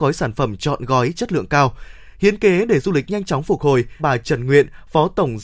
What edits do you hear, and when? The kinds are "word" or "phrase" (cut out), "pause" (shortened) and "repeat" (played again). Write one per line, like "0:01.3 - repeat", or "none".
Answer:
0:04.0 - word